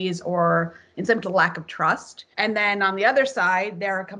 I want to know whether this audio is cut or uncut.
cut